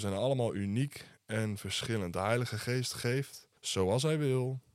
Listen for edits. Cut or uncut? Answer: cut